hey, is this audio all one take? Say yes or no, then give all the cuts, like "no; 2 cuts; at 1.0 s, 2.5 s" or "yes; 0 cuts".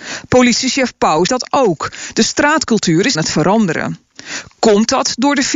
no; 2 cuts; at 1.3 s, 3.1 s